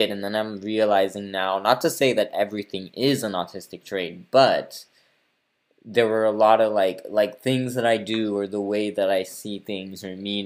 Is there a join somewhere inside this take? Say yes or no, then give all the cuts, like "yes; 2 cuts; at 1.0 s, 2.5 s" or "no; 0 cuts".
no; 0 cuts